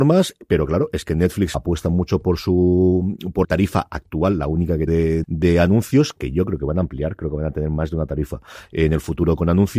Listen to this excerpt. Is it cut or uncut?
cut